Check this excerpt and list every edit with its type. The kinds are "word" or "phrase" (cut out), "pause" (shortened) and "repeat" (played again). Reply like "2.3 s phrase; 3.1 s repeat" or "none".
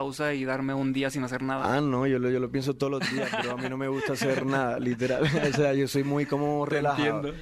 none